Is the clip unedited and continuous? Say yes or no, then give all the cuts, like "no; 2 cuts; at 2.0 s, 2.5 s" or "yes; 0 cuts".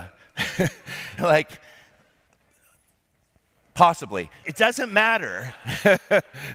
no; 2 cuts; at 1.2 s, 4.4 s